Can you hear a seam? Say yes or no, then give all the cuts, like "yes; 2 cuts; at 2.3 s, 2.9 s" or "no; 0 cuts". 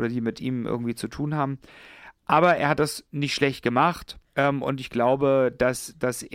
yes; 2 cuts; at 3.1 s, 4.3 s